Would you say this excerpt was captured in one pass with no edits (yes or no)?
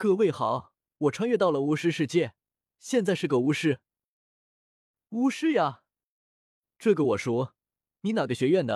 yes